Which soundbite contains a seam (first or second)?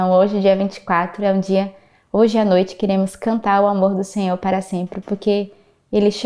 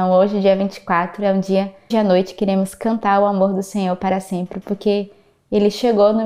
second